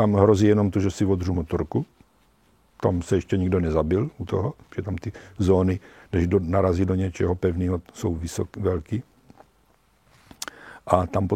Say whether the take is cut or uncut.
uncut